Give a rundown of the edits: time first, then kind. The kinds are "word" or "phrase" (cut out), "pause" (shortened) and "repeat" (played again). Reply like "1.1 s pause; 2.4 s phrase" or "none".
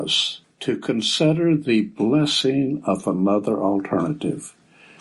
none